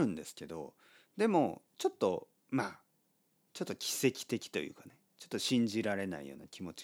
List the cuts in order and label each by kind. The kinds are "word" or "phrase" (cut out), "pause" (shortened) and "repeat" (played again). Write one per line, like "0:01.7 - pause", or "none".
none